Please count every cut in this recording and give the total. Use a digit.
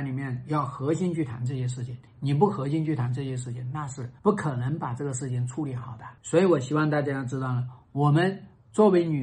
3